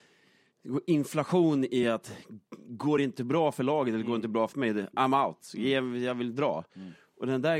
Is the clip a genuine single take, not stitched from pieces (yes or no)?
yes